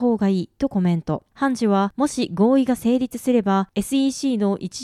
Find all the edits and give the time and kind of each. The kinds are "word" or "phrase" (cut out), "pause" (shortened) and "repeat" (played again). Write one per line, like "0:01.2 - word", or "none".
none